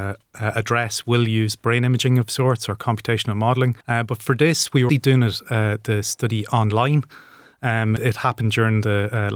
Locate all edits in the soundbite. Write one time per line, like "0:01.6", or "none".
0:03.8
0:04.9
0:08.0